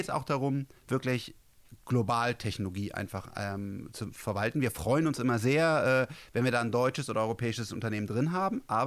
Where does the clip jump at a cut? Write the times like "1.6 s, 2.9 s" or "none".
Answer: none